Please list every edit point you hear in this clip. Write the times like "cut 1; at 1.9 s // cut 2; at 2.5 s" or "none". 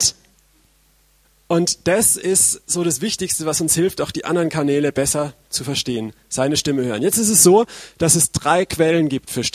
none